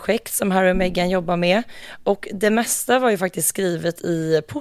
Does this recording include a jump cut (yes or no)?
no